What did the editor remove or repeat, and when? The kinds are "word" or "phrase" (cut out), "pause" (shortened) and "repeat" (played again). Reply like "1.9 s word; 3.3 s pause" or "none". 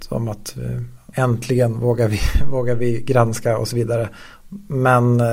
1.1 s word